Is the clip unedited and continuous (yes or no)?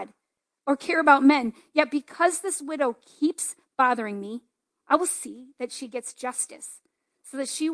yes